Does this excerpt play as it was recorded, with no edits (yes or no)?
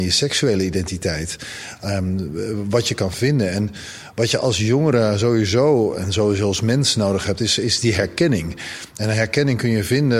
yes